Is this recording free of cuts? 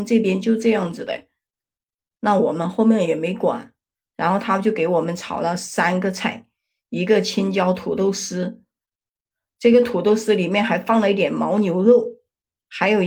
yes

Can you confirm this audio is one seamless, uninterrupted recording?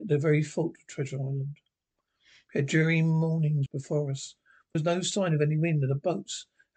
no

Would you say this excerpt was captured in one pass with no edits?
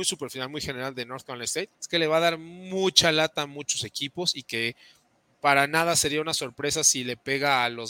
no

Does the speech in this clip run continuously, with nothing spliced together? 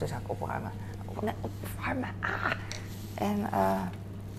no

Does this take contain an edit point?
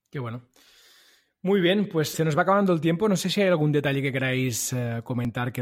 yes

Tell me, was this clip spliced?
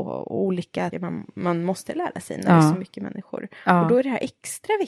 yes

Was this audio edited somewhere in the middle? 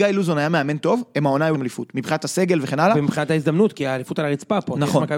yes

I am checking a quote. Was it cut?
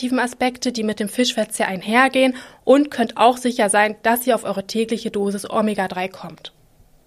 no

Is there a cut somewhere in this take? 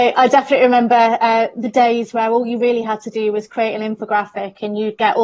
no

